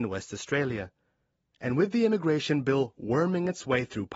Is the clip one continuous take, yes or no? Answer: yes